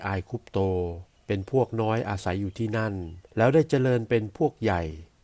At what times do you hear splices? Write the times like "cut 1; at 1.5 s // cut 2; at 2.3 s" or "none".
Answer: cut 1; at 1.2 s // cut 2; at 3.3 s